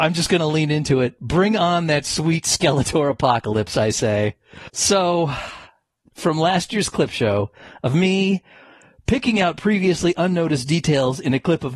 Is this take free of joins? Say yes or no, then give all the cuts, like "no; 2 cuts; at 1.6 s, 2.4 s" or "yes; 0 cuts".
no; 1 cut; at 6.1 s